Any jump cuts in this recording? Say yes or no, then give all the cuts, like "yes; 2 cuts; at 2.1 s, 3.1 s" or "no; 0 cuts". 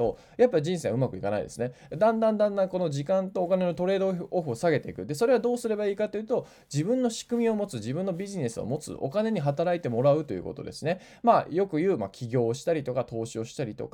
no; 0 cuts